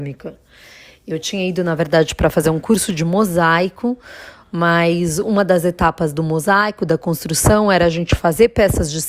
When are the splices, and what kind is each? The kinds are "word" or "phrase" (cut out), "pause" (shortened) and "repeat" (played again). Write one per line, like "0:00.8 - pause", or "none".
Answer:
none